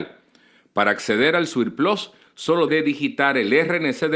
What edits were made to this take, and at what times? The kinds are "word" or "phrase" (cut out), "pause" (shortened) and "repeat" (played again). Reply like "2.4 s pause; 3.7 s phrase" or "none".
2.7 s word

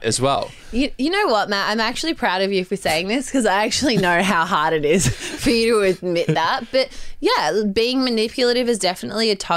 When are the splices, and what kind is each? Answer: none

